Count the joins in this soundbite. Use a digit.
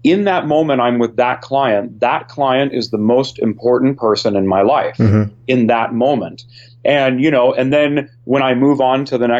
0